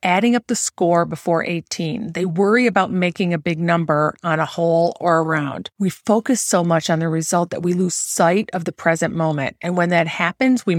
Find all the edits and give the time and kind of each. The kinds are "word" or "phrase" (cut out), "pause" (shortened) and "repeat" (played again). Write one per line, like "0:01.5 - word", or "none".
0:05.7 - pause